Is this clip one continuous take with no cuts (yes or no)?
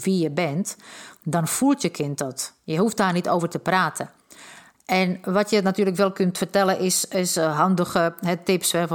yes